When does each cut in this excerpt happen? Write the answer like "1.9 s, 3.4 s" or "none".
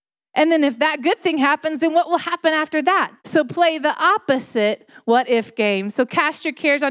3.2 s